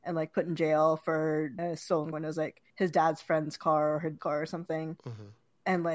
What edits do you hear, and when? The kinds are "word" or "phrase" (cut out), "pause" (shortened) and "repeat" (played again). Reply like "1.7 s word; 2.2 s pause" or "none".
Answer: 1.6 s word; 2.1 s word; 2.7 s pause; 4.2 s phrase